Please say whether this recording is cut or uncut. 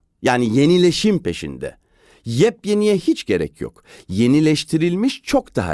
uncut